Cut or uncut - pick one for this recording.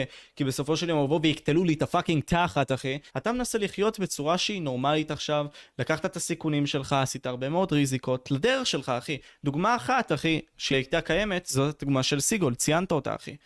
cut